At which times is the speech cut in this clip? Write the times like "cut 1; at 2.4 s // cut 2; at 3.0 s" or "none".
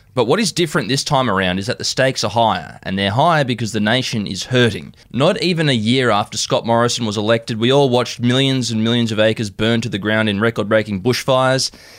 cut 1; at 5.0 s